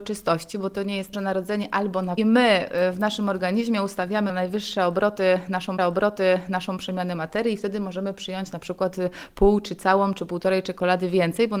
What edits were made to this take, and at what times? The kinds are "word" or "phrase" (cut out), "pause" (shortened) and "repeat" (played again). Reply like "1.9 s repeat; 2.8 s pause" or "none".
1.1 s phrase; 2.2 s phrase; 4.3 s word; 5.8 s repeat